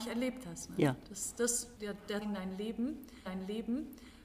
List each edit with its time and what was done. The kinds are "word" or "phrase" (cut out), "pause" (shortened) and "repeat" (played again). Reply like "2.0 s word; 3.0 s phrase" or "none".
1.8 s word; 2.2 s phrase; 3.3 s repeat